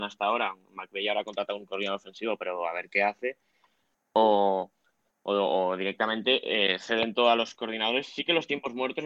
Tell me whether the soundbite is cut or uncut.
uncut